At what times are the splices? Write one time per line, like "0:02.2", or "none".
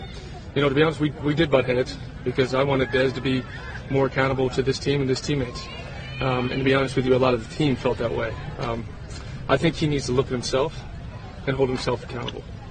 none

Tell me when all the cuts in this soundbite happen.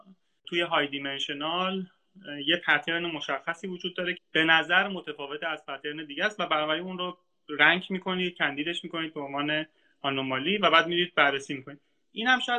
0:04.1

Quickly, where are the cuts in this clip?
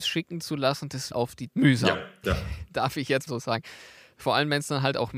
0:01.1
0:01.5
0:02.2
0:03.3

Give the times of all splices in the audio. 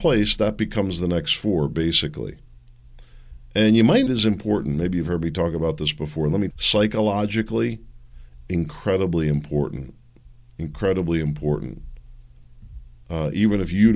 0:04.1
0:06.5

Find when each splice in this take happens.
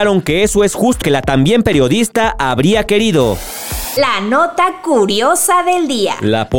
0:01.0

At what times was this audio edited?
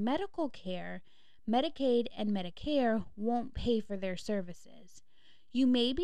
none

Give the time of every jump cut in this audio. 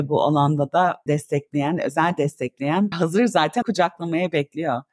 0:01.1
0:02.9
0:03.6

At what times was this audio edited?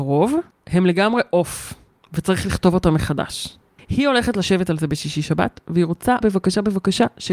0:06.2

